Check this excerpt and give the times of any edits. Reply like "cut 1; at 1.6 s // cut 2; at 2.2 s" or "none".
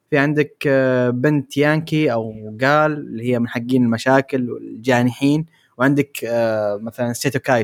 none

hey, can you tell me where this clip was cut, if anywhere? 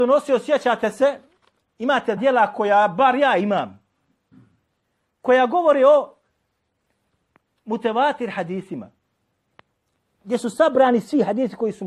cut 1; at 2.2 s

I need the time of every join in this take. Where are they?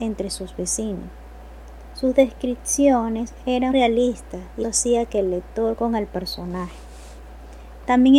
cut 1; at 3.7 s // cut 2; at 4.6 s // cut 3; at 5.8 s

